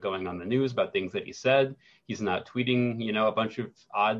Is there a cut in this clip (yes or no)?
no